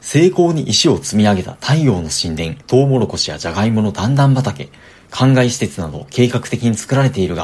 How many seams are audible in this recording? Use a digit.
1